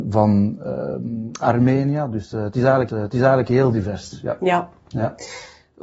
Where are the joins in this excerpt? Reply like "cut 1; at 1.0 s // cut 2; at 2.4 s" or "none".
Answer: cut 1; at 2.9 s